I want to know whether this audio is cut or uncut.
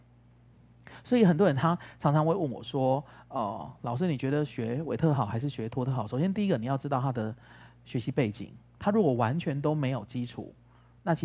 uncut